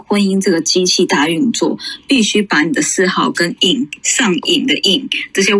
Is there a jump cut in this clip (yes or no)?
no